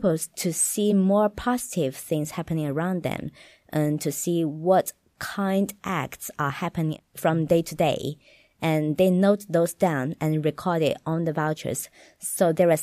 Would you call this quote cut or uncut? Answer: uncut